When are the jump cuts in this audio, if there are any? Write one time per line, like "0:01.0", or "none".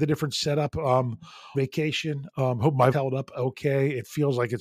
0:01.5
0:02.9